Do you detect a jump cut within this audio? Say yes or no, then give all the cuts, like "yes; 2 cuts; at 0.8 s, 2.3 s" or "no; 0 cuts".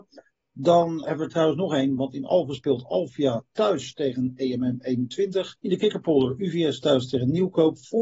yes; 1 cut; at 5.6 s